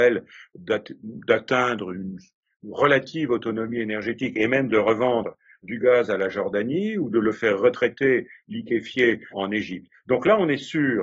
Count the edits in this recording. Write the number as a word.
two